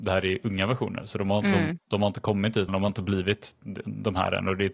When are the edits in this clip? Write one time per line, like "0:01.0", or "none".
0:02.7